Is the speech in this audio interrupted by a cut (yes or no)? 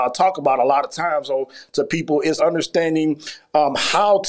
yes